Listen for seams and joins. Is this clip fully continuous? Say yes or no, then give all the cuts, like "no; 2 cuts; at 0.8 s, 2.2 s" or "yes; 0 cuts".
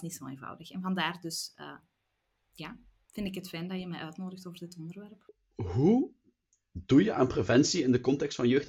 yes; 0 cuts